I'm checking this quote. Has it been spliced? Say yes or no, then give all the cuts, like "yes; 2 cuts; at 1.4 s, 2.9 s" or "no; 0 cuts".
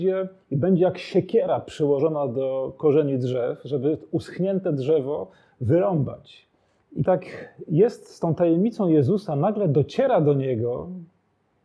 yes; 1 cut; at 7.0 s